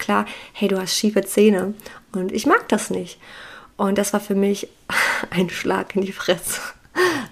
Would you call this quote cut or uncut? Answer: uncut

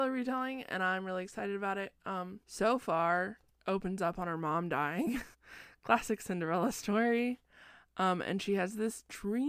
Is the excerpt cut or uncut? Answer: cut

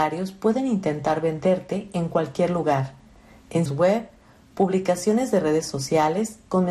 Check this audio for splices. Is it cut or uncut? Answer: cut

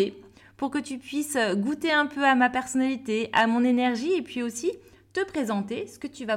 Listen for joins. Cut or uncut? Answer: uncut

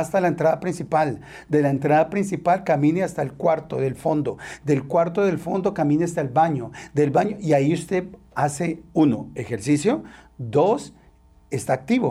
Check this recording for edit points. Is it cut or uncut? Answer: uncut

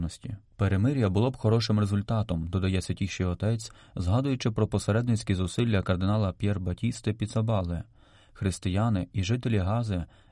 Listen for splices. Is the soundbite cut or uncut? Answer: uncut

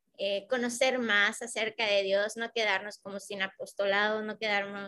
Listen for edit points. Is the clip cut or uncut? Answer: uncut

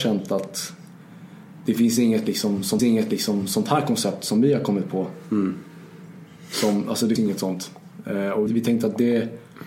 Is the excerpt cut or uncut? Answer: cut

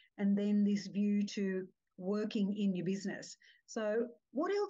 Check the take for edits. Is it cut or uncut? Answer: uncut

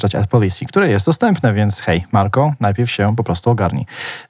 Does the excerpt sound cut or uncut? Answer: uncut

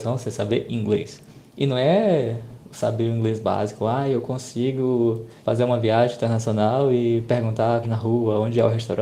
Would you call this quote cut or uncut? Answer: cut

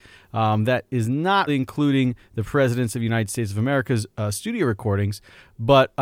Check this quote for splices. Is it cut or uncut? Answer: cut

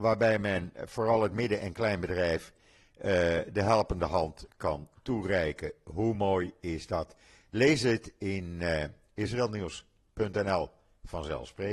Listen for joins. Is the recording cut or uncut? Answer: uncut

